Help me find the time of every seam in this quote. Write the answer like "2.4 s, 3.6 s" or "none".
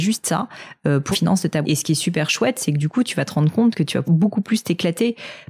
1.1 s, 1.6 s, 4.0 s